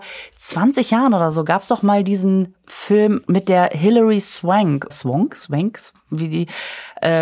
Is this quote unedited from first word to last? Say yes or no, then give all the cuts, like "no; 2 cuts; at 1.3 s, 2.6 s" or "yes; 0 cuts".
no; 2 cuts; at 3.2 s, 4.9 s